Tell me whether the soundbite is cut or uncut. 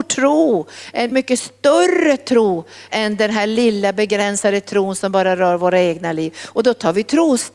cut